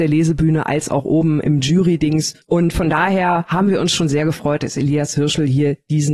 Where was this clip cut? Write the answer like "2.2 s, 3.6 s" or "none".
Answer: 2.4 s